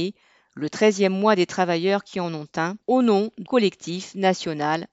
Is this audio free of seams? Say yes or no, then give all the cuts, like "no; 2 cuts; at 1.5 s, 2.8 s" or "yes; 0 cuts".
no; 2 cuts; at 2.8 s, 3.5 s